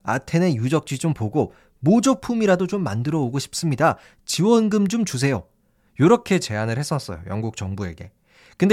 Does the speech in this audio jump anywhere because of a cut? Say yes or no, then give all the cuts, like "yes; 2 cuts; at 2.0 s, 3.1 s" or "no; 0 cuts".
no; 0 cuts